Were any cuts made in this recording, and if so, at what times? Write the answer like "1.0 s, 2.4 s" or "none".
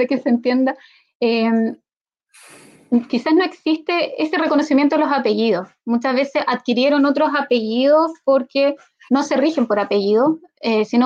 none